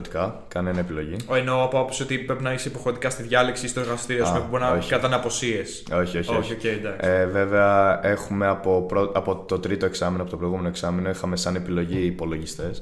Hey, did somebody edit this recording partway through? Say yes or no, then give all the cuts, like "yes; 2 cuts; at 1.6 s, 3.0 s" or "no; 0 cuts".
no; 0 cuts